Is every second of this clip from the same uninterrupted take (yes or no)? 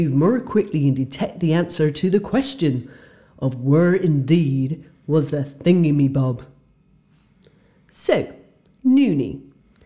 yes